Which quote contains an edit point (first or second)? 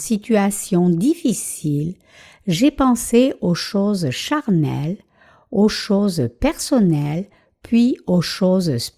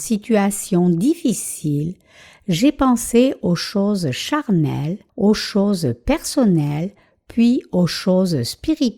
second